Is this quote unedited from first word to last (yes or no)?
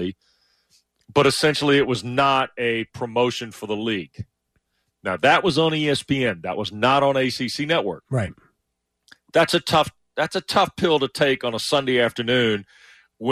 yes